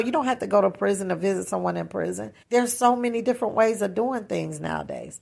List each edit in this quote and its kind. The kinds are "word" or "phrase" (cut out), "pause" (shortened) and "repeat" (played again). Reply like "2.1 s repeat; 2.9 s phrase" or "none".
2.4 s pause